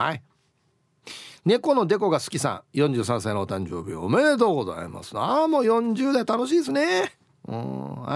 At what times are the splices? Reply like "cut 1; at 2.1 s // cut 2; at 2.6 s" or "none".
none